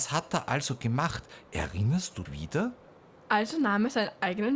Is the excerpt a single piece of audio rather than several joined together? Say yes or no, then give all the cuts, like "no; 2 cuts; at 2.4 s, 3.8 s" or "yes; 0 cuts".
no; 1 cut; at 2.3 s